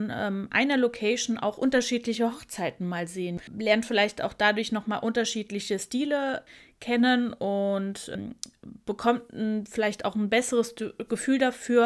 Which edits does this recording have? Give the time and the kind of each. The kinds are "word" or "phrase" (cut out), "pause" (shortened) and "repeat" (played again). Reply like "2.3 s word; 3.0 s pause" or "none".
none